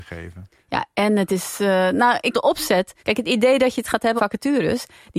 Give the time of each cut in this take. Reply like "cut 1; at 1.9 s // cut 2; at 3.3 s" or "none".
cut 1; at 2.3 s // cut 2; at 3.0 s // cut 3; at 4.2 s